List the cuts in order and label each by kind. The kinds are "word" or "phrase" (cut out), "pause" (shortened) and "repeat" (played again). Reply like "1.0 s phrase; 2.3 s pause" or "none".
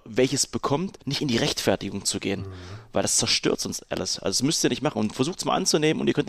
1.0 s pause